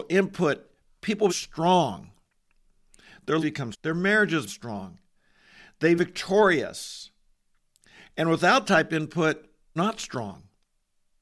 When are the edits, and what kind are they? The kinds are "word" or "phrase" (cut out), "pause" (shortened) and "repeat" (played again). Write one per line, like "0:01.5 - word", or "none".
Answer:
0:01.3 - word
0:03.4 - word
0:03.7 - word
0:04.5 - word
0:06.0 - word
0:08.6 - word
0:09.8 - word